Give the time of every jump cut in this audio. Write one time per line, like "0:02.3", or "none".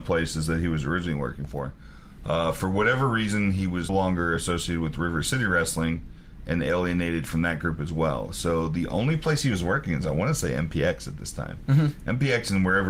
0:03.9